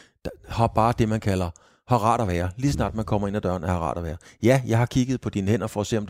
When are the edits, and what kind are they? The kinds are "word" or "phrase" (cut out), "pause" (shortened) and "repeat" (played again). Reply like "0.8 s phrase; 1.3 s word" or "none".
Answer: none